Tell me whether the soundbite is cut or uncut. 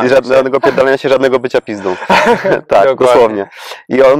uncut